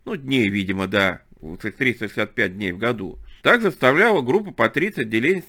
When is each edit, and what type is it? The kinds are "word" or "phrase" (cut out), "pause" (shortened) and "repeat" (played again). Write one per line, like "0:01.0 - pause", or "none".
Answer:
0:03.4 - pause